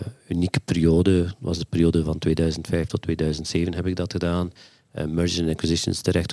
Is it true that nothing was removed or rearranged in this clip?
yes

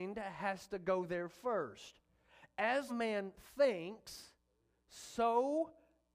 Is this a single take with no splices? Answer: no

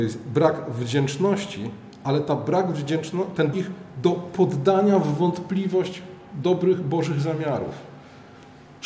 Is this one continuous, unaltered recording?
no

